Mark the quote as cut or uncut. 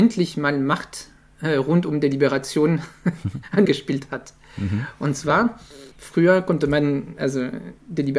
cut